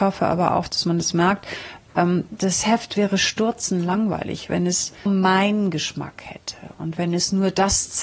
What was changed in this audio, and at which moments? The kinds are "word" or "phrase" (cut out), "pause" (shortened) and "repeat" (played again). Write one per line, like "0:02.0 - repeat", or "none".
0:05.1 - word